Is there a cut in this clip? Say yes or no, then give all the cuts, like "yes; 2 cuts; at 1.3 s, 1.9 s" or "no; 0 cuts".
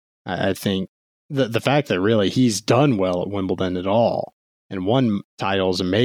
no; 0 cuts